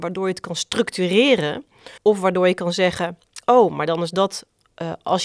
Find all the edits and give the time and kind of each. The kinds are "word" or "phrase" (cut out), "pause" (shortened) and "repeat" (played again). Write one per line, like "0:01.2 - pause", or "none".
0:02.0 - pause